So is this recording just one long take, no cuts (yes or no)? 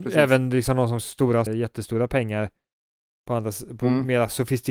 no